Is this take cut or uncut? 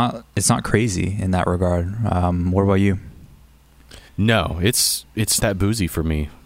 cut